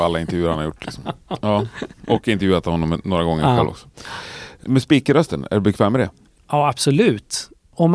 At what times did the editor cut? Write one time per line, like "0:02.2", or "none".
0:04.6